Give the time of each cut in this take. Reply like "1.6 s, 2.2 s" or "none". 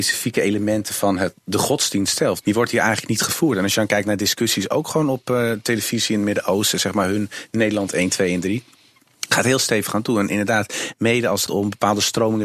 2.4 s, 11.5 s